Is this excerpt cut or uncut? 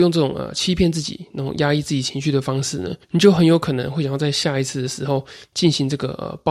cut